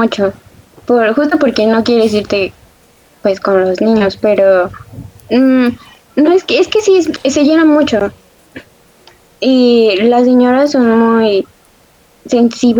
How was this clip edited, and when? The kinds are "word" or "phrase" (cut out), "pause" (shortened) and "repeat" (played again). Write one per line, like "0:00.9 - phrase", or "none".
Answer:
none